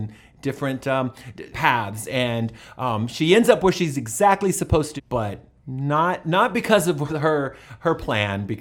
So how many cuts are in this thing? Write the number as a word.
four